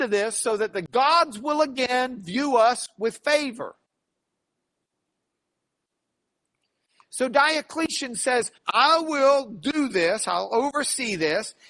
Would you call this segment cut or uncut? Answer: cut